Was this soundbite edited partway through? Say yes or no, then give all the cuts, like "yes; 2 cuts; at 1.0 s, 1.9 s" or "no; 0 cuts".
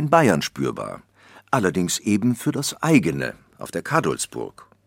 no; 0 cuts